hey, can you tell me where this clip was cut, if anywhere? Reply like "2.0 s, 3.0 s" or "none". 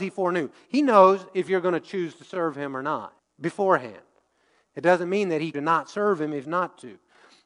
3.2 s, 5.5 s, 6.4 s